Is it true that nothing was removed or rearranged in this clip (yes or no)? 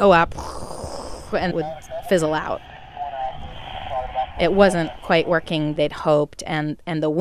no